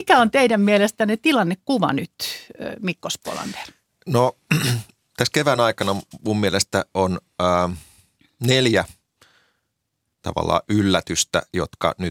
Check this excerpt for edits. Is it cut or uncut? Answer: uncut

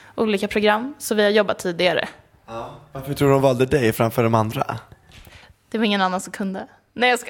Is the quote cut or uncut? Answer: uncut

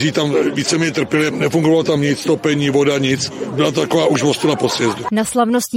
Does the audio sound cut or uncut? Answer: uncut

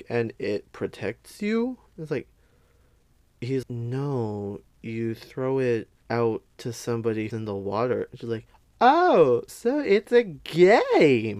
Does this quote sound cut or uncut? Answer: cut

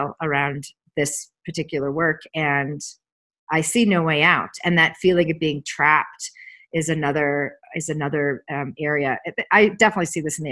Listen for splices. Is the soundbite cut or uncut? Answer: uncut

